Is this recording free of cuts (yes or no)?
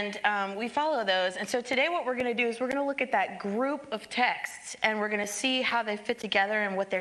yes